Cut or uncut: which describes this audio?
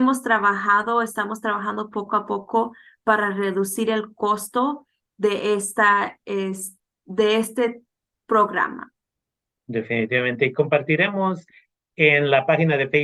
uncut